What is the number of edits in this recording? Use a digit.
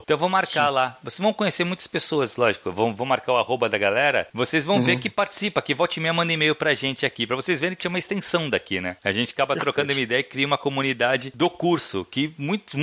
1